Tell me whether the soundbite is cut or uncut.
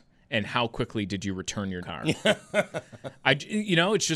cut